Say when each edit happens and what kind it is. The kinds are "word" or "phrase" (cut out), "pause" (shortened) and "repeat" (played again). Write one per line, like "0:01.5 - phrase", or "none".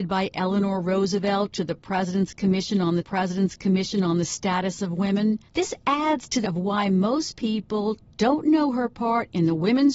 0:03.0 - repeat
0:05.5 - pause
0:06.4 - word